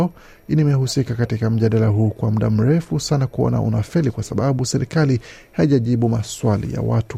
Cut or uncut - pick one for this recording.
uncut